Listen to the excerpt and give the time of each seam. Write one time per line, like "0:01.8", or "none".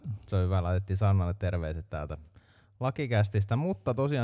none